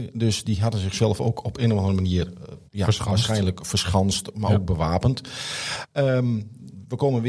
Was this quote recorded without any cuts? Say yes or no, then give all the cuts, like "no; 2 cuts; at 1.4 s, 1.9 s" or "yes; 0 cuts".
no; 1 cut; at 2.7 s